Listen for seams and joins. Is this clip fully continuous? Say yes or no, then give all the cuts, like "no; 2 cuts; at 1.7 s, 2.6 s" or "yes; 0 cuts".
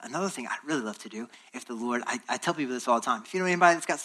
yes; 0 cuts